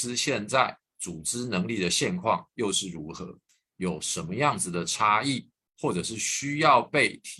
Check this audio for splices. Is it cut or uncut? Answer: uncut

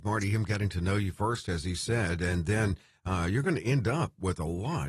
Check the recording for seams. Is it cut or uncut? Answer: uncut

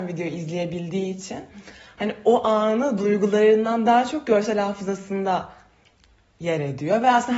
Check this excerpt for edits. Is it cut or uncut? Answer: uncut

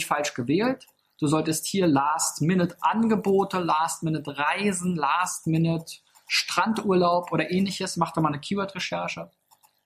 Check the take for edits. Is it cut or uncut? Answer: uncut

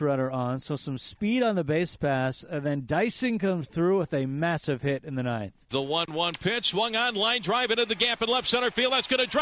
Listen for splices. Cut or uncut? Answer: cut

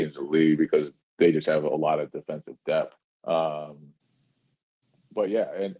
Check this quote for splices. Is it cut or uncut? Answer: cut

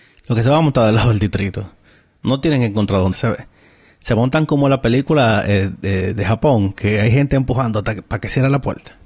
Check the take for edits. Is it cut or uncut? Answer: cut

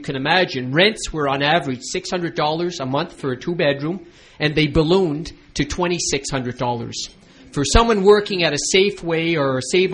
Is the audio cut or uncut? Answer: uncut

